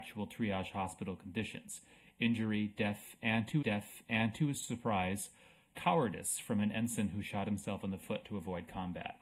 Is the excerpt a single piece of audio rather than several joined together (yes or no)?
no